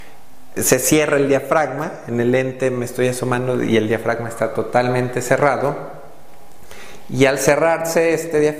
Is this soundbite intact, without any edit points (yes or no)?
yes